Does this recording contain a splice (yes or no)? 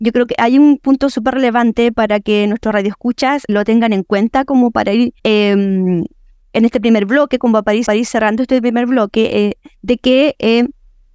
yes